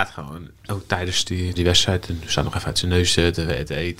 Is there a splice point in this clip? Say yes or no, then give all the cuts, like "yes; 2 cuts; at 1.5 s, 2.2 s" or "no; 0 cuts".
yes; 1 cut; at 1.6 s